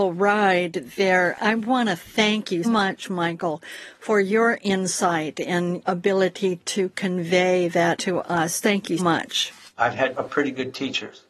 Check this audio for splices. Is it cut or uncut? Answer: cut